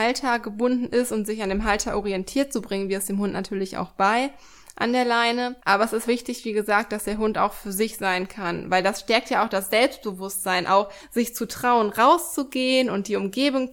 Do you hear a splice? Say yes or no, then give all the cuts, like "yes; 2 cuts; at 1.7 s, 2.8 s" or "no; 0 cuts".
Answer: yes; 2 cuts; at 5.6 s, 6.0 s